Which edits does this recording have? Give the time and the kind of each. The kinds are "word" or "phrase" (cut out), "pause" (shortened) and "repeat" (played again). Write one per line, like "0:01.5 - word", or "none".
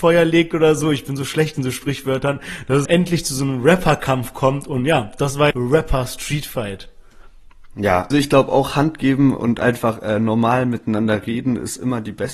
0:02.9 - word
0:05.5 - phrase
0:08.1 - word